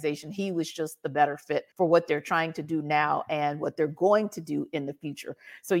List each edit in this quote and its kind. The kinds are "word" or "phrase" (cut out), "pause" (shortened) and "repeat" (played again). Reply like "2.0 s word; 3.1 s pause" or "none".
1.7 s pause